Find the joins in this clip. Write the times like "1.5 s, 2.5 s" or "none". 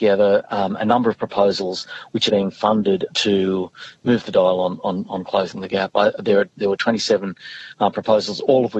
2.3 s, 3.1 s